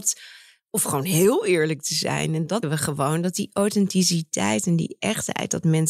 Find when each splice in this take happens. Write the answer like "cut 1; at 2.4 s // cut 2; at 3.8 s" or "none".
cut 1; at 2.6 s